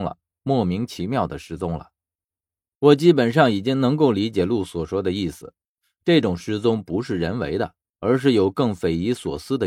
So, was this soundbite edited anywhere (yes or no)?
no